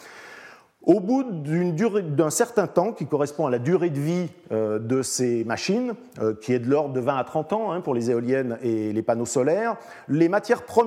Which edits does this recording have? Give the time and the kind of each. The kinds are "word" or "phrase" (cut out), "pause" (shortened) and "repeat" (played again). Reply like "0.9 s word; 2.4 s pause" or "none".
none

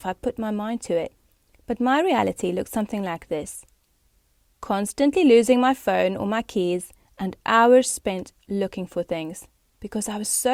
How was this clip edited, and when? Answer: none

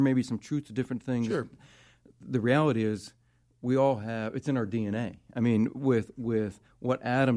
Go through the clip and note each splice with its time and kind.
none

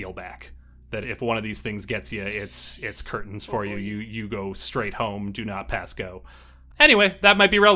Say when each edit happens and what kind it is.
1.0 s word

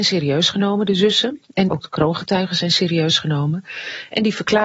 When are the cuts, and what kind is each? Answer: 1.7 s phrase

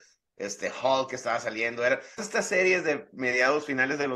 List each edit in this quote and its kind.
2.2 s word

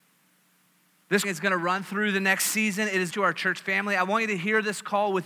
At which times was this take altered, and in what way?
1.2 s phrase; 3.1 s phrase

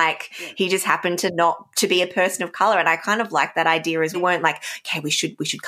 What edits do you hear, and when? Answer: 4.1 s phrase

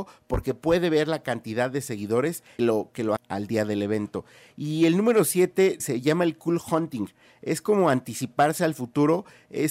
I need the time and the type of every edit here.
2.6 s word; 3.2 s word; 5.8 s word

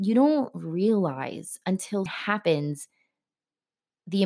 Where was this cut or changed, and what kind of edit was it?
2.1 s word

